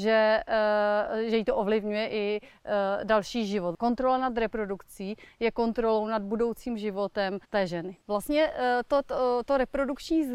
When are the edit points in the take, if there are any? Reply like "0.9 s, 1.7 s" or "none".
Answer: 7.4 s, 8.0 s